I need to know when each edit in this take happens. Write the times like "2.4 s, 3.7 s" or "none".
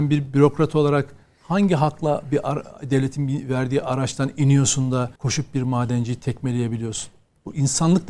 5.2 s

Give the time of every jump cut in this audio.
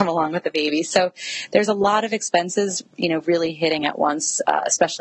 none

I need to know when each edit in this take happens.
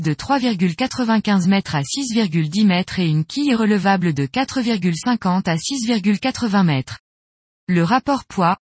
none

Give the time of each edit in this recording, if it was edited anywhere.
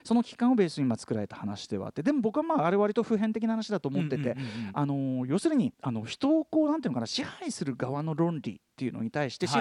5.7 s

